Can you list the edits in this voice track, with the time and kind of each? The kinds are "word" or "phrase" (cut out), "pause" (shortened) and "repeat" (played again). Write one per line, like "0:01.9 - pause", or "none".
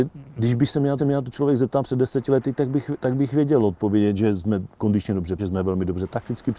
0:01.0 - repeat
0:05.4 - word